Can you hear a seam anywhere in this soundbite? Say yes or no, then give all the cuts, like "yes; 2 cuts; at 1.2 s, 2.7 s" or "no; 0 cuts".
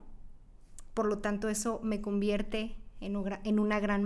no; 0 cuts